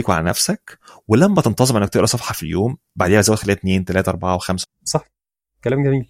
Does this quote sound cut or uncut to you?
cut